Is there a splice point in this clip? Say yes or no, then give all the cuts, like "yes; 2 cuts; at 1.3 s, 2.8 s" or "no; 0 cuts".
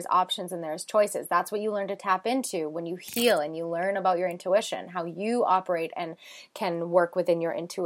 no; 0 cuts